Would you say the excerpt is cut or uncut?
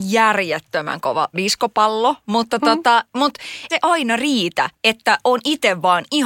cut